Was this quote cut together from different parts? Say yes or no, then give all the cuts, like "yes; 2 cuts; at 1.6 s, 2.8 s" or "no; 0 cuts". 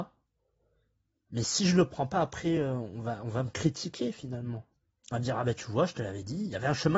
no; 0 cuts